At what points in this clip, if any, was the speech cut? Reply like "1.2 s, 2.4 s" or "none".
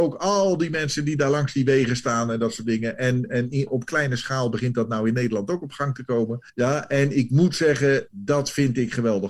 6.5 s